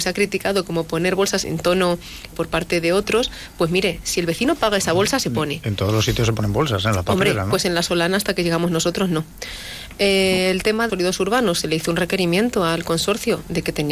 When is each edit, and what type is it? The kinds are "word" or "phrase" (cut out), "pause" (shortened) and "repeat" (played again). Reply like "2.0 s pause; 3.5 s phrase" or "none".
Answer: 1.4 s phrase; 2.3 s word; 10.9 s phrase